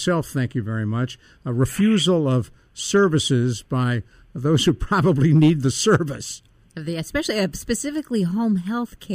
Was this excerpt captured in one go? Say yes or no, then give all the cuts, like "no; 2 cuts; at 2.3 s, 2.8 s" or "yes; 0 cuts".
yes; 0 cuts